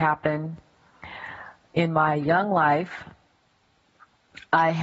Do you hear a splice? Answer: no; 0 cuts

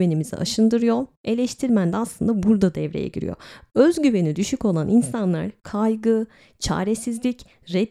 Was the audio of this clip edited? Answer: no; 0 cuts

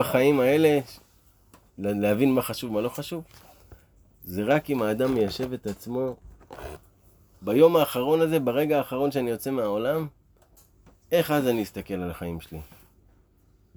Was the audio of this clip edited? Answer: no; 0 cuts

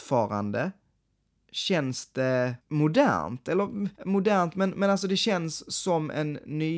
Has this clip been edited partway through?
yes; 2 cuts; at 2.6 s, 4.0 s

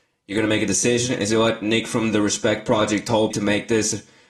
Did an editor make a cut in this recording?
yes; 1 cut; at 3.3 s

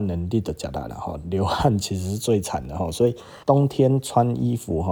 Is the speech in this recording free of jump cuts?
no; 1 cut; at 3.4 s

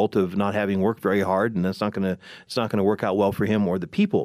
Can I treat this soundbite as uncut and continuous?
yes; 0 cuts

